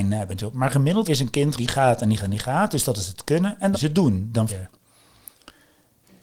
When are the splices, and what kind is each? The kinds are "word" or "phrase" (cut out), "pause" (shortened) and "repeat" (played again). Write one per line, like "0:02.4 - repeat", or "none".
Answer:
0:01.0 - word
0:01.6 - word
0:02.2 - word
0:03.7 - word
0:04.5 - word